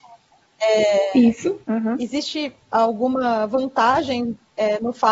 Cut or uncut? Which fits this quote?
cut